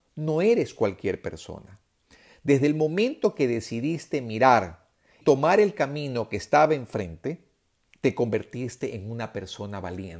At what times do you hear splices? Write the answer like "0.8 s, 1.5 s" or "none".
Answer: 5.2 s

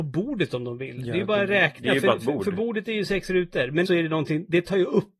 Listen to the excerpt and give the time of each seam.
3.8 s

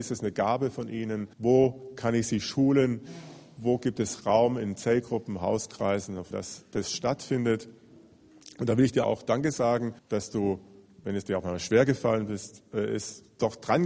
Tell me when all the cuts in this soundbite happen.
1.3 s, 6.3 s, 9.0 s, 10.0 s

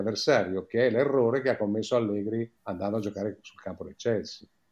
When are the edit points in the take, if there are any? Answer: 2.6 s

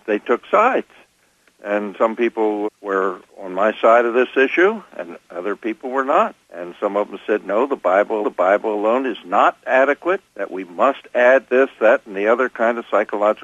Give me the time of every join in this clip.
1.9 s, 2.6 s, 3.3 s, 6.4 s, 8.2 s, 10.3 s

